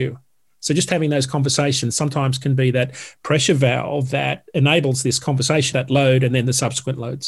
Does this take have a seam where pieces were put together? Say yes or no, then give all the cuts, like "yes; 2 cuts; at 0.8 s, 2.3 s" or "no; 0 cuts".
yes; 1 cut; at 5.7 s